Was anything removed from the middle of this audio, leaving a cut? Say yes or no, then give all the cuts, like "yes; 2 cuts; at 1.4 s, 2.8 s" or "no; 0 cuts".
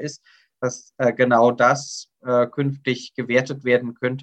no; 0 cuts